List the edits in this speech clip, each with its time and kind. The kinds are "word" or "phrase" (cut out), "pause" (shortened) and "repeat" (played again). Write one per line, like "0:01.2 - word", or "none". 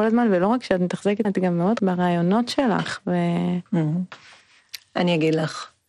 0:01.2 - word
0:01.8 - word